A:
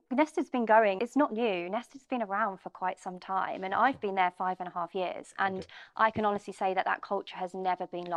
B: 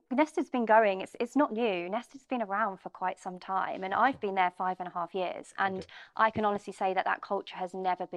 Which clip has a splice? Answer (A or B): A